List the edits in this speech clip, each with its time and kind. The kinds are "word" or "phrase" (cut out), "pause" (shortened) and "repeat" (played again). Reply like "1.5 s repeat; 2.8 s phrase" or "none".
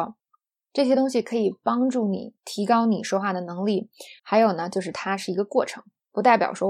2.4 s pause; 4.2 s pause